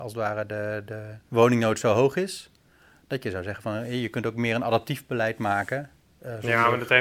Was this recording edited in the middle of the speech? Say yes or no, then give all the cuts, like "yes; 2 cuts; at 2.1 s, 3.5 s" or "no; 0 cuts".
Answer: yes; 1 cut; at 1.3 s